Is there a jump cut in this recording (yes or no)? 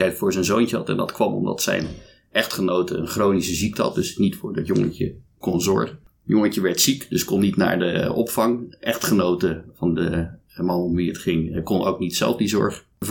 no